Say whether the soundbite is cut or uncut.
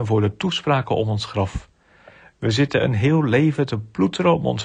uncut